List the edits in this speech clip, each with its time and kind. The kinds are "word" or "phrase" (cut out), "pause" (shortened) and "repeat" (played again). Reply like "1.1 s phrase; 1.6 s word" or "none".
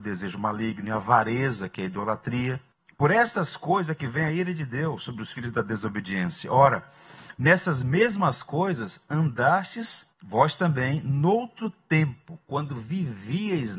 2.7 s pause; 10.1 s pause